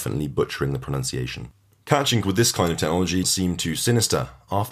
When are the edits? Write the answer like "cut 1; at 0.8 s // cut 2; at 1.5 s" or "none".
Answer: cut 1; at 2.2 s // cut 2; at 3.2 s